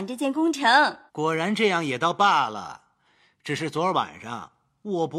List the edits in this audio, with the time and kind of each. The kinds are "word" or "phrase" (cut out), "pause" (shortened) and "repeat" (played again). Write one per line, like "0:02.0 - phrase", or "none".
0:01.1 - pause